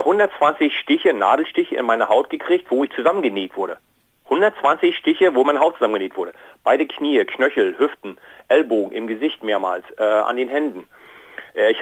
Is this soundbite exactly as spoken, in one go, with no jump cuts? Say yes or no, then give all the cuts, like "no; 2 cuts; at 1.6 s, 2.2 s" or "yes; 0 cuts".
yes; 0 cuts